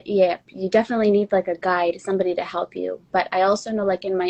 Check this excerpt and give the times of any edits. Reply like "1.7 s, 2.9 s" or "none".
none